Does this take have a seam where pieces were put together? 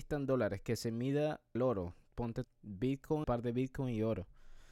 yes; 3 cuts; at 1.6 s, 2.4 s, 3.2 s

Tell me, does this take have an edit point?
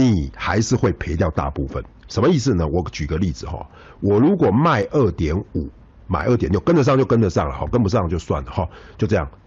no; 0 cuts

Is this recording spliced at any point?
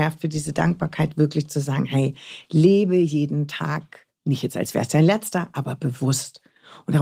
yes; 1 cut; at 4.2 s

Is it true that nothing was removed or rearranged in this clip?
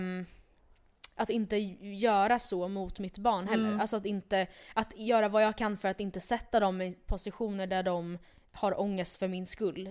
yes; 0 cuts

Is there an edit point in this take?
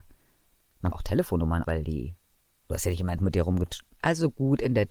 yes; 3 cuts; at 0.9 s, 1.6 s, 3.2 s

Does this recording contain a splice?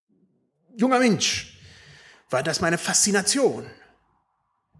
no; 0 cuts

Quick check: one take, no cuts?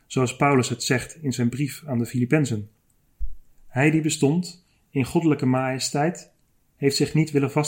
yes; 0 cuts

